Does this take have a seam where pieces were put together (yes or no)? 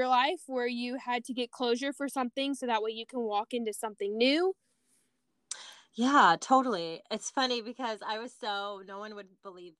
no